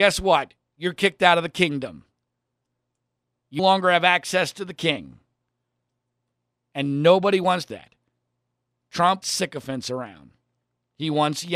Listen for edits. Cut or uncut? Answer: cut